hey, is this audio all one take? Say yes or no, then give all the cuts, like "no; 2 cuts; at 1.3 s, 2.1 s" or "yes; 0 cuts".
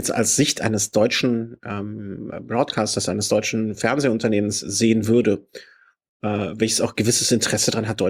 yes; 0 cuts